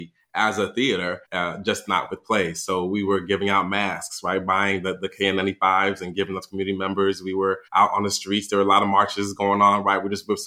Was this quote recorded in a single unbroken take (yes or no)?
no